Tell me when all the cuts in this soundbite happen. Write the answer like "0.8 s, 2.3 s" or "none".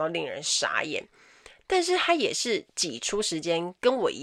none